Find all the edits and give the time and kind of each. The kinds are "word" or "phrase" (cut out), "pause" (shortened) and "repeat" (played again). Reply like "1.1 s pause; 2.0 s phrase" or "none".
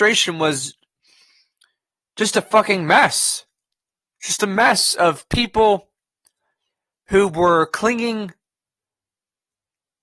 none